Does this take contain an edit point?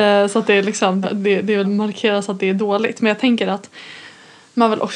yes; 2 cuts; at 1.0 s, 1.6 s

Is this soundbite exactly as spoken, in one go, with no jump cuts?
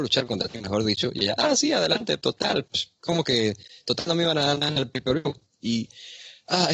yes; 0 cuts

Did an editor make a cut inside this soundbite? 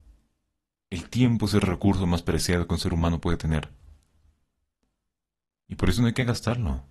no; 0 cuts

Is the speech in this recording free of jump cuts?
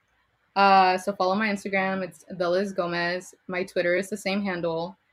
yes; 0 cuts

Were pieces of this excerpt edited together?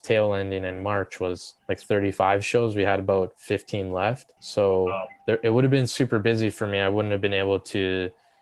yes; 3 cuts; at 1.6 s, 4.4 s, 5.2 s

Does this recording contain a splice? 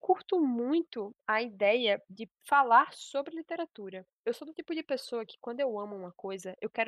no; 0 cuts

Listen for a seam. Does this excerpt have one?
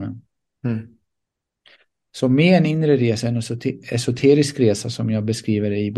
no; 0 cuts

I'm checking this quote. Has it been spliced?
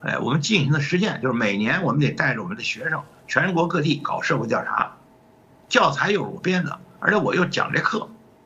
no; 0 cuts

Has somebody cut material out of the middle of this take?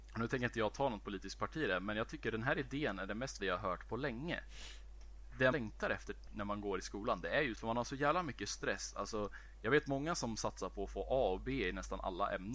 yes; 3 cuts; at 3.4 s, 5.5 s, 7.5 s

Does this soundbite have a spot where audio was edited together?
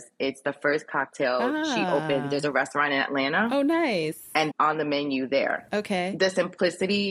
yes; 1 cut; at 4.5 s

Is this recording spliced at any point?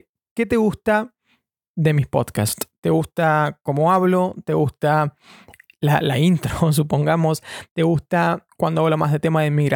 no; 0 cuts

